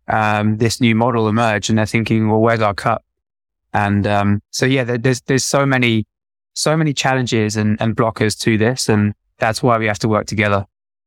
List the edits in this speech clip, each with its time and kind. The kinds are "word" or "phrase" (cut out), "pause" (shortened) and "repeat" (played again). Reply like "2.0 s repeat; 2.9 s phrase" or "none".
none